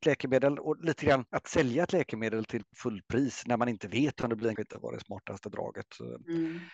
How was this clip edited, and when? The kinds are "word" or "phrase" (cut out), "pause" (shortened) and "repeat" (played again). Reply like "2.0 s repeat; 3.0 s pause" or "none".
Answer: 1.3 s pause; 2.7 s word; 4.6 s phrase